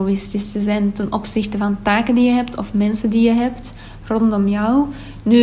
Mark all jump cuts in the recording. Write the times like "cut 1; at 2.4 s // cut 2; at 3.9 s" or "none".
none